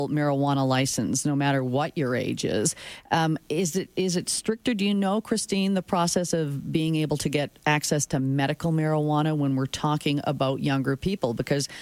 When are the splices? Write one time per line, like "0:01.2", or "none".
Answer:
none

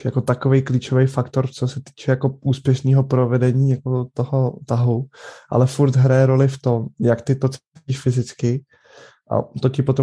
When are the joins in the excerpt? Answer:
none

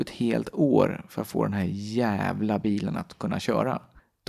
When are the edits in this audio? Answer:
none

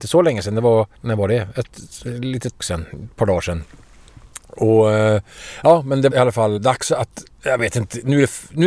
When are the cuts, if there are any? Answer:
0:00.9
0:02.6
0:06.1
0:06.6
0:07.3

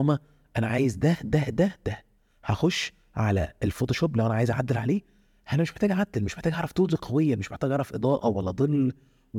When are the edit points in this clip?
none

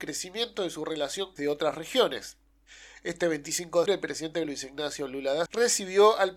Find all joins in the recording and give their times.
0:01.4
0:03.9
0:04.4
0:05.5

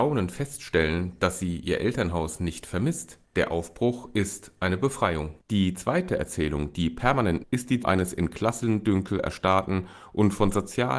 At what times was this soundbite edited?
0:03.3
0:05.4
0:07.4
0:07.8

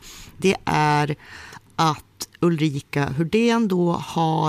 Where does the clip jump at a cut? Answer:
none

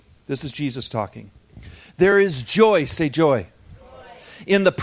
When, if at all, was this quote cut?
none

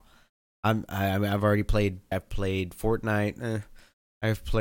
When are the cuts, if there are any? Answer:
0:02.1

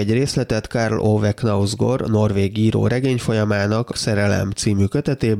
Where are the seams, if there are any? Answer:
0:03.9

